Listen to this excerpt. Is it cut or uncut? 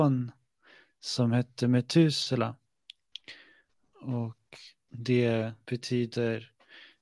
cut